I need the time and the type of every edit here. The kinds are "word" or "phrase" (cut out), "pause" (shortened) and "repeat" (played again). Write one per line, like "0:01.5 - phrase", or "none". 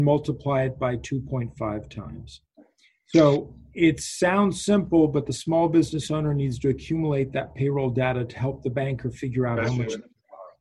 none